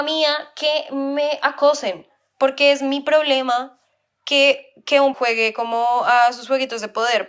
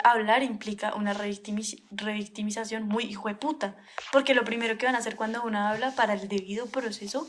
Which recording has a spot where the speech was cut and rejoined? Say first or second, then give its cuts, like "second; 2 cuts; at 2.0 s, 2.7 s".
first; 2 cuts; at 4.1 s, 5.1 s